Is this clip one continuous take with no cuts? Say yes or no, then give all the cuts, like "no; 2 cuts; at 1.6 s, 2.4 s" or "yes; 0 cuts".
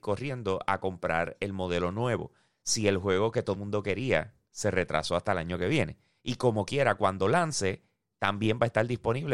no; 1 cut; at 3.6 s